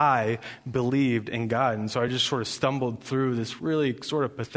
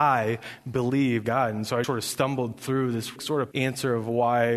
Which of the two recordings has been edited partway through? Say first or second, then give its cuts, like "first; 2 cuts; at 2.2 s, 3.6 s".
second; 4 cuts; at 1.2 s, 1.8 s, 3.2 s, 3.5 s